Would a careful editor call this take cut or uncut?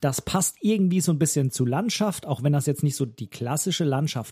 uncut